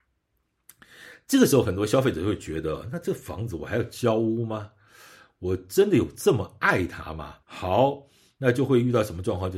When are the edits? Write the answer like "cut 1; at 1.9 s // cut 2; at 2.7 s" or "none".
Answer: cut 1; at 7.4 s